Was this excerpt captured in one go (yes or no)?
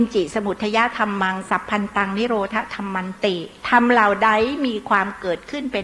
no